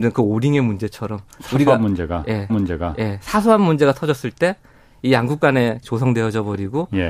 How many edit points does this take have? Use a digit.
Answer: 2